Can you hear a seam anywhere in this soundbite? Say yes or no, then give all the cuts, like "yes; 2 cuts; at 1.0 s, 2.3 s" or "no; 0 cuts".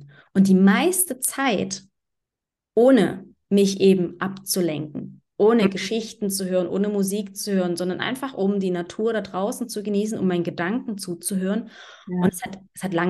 no; 0 cuts